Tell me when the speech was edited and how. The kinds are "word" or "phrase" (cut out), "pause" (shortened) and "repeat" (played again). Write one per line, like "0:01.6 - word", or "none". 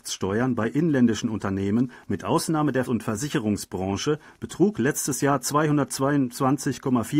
0:02.9 - word